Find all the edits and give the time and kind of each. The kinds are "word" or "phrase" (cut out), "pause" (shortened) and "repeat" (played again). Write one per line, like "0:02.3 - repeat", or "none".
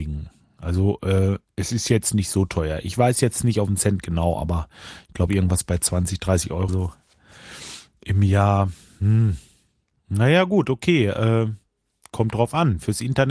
0:06.7 - word